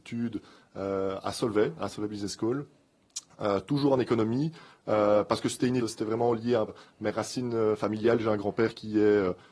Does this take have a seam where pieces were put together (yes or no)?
yes